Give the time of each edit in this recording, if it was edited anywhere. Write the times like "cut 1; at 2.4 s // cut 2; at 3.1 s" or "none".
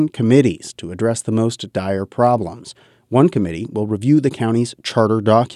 none